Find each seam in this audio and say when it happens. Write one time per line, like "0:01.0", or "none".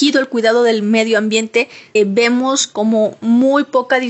0:02.0